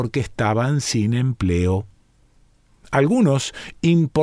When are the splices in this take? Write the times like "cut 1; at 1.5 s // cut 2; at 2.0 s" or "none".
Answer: none